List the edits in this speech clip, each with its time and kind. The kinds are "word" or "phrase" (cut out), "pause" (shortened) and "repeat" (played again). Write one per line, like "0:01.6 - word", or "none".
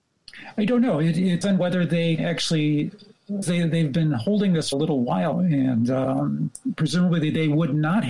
0:01.4 - word
0:02.2 - word
0:03.4 - word
0:04.7 - word
0:05.3 - word